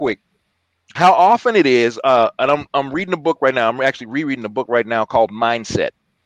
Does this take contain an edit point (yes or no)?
no